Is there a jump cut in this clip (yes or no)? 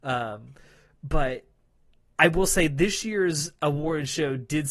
no